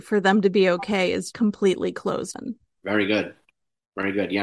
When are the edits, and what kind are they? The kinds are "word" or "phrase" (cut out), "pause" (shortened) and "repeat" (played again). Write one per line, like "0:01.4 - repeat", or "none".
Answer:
0:01.3 - word
0:02.3 - word
0:02.7 - word

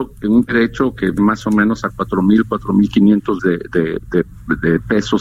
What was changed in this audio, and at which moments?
0:01.2 - word
0:03.4 - word

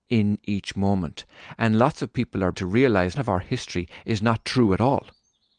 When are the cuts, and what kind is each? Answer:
0:02.5 - word
0:03.2 - phrase

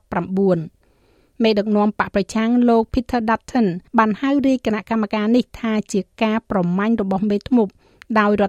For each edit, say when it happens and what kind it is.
0:03.9 - pause

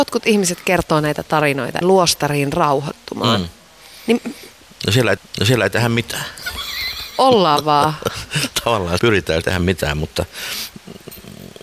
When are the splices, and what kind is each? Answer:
0:01.8 - phrase
0:05.2 - repeat
0:09.0 - word
0:09.4 - word

